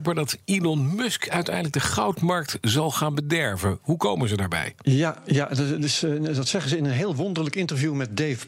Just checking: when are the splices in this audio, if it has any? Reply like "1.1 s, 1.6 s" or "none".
none